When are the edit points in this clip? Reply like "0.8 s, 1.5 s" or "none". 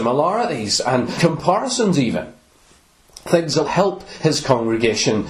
1.2 s, 3.6 s